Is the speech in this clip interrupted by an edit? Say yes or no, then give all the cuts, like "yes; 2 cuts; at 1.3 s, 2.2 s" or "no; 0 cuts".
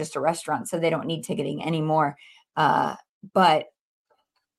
no; 0 cuts